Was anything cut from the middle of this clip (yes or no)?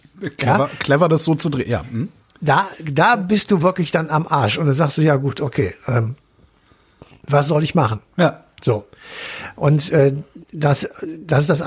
no